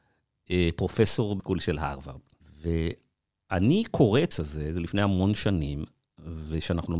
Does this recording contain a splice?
yes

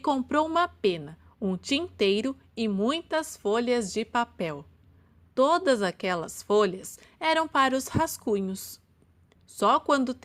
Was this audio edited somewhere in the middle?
no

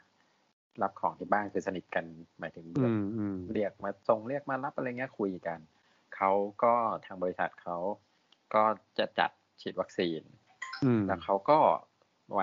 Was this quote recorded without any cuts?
yes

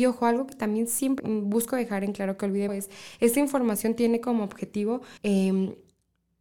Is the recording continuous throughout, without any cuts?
no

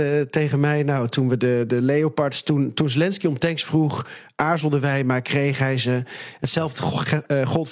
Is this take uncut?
yes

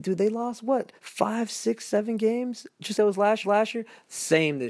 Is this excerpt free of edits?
no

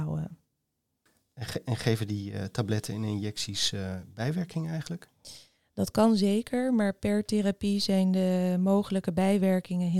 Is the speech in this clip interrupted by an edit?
no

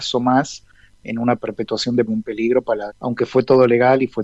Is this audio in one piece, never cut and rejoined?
no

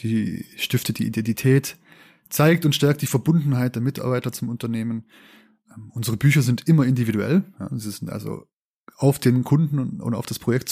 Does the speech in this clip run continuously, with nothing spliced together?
yes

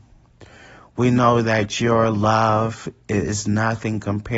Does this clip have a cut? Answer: no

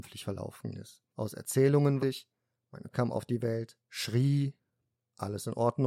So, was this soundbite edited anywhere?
yes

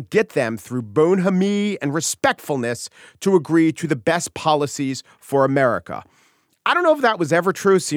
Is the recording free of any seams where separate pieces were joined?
yes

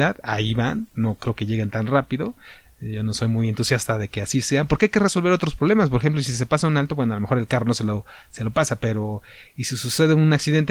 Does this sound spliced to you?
no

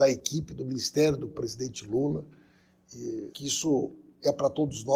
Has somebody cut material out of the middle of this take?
yes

